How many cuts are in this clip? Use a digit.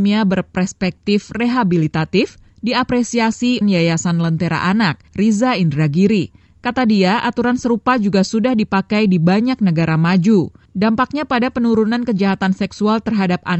1